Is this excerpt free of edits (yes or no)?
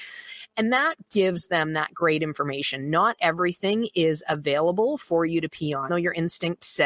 no